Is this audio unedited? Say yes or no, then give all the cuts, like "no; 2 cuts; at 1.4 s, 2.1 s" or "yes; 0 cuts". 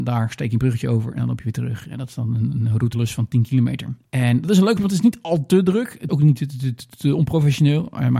no; 4 cuts; at 2.9 s, 4.1 s, 4.8 s, 6.1 s